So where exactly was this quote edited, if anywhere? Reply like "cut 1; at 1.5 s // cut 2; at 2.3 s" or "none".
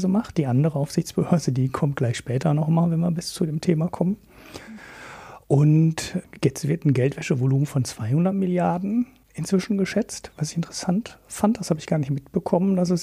none